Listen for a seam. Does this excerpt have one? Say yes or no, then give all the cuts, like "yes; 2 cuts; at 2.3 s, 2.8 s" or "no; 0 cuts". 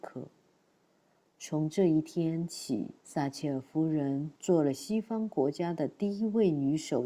yes; 2 cuts; at 3.0 s, 4.4 s